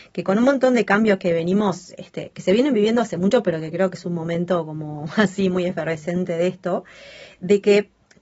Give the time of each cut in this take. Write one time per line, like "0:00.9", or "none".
none

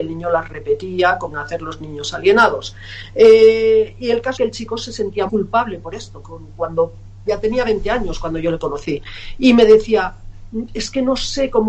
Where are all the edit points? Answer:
0:01.3
0:04.4
0:05.3
0:06.2
0:07.3

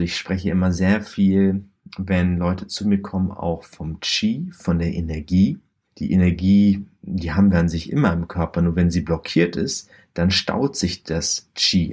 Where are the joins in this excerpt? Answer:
none

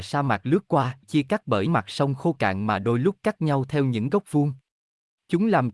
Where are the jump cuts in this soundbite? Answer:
0:01.0
0:01.7

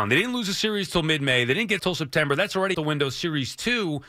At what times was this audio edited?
0:01.8
0:02.7

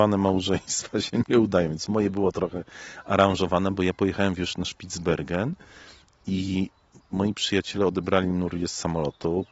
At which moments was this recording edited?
none

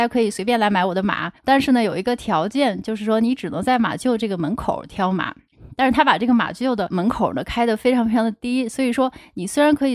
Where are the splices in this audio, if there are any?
0:01.4

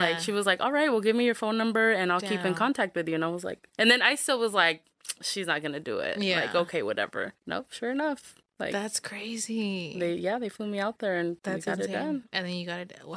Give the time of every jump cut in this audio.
0:03.7
0:07.4
0:11.4

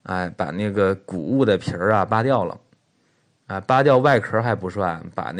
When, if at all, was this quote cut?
none

